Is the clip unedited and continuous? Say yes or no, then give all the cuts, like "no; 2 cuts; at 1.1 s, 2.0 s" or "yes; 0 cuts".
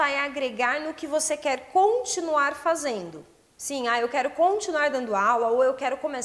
yes; 0 cuts